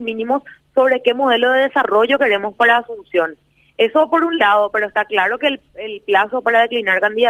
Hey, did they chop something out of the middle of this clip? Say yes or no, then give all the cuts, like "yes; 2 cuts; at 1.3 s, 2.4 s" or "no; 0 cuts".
no; 0 cuts